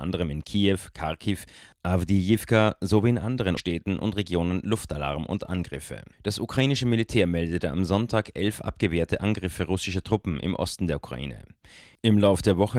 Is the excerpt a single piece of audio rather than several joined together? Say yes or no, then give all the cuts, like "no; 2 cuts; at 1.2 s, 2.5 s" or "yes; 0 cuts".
no; 2 cuts; at 3.6 s, 6.1 s